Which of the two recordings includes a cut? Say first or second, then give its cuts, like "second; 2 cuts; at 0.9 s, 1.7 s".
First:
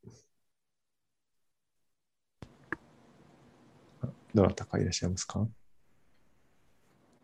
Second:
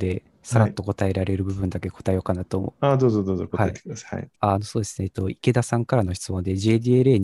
second; 1 cut; at 4.4 s